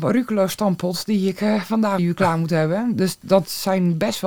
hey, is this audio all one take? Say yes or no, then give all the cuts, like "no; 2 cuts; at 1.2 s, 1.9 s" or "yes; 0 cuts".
no; 1 cut; at 2.0 s